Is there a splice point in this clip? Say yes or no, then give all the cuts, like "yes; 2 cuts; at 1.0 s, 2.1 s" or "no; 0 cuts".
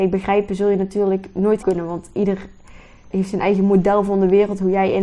yes; 2 cuts; at 1.6 s, 3.1 s